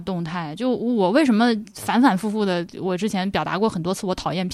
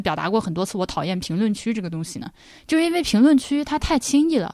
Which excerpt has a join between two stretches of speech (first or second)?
second